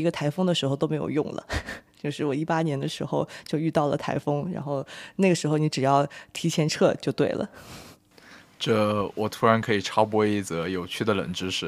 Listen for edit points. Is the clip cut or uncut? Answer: uncut